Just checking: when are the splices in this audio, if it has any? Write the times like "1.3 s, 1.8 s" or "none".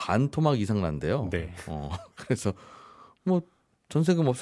none